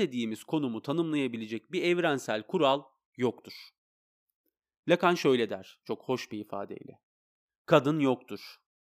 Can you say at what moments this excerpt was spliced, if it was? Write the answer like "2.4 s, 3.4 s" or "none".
none